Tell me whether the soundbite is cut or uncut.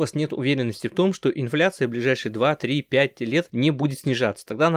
uncut